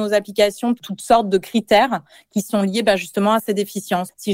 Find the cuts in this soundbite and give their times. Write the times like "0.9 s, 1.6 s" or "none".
none

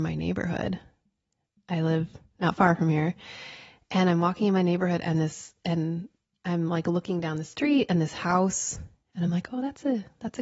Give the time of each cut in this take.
none

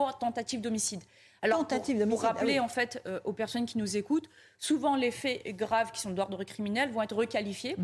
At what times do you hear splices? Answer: none

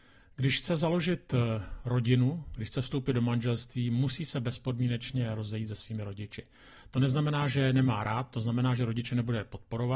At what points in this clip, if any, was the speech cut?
none

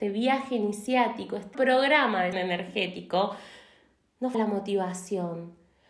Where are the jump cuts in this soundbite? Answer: 1.5 s, 2.3 s, 4.3 s

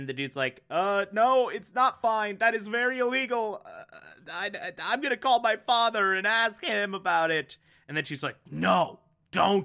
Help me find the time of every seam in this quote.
none

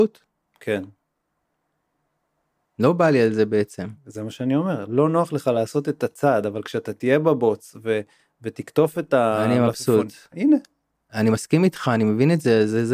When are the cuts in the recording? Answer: none

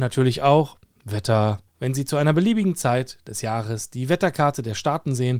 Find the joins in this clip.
1.7 s

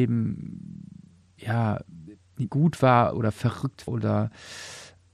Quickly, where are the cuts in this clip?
2.5 s, 3.9 s

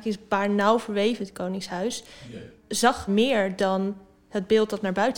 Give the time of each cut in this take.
1.2 s, 3.1 s

